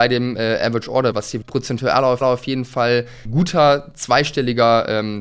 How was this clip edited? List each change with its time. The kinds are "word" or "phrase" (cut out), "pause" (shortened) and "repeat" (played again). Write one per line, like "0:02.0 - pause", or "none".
0:01.1 - word
0:01.4 - word
0:02.2 - repeat
0:03.3 - word